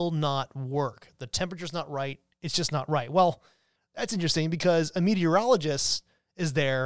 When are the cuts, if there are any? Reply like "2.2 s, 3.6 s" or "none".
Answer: none